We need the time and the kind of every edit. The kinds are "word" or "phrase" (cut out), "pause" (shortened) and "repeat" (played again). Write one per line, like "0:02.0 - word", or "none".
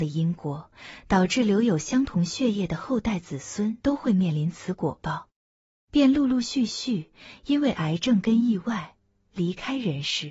0:03.8 - pause